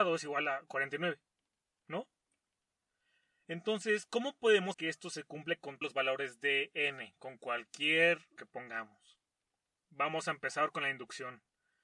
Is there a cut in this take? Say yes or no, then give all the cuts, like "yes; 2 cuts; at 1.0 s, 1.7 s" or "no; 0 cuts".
yes; 3 cuts; at 4.7 s, 5.8 s, 8.4 s